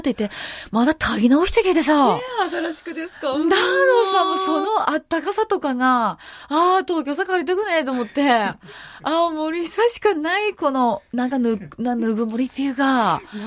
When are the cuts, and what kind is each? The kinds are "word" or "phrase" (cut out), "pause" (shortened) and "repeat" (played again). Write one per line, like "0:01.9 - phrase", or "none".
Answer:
none